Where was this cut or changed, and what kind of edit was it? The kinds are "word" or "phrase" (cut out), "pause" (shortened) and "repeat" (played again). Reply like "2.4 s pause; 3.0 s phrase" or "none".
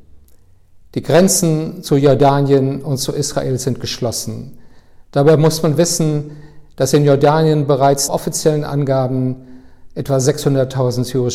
8.1 s word